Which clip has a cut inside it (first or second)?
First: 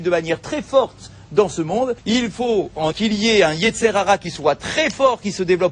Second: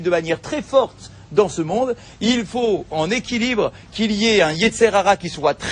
first